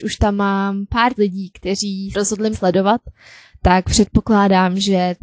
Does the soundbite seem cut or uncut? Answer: cut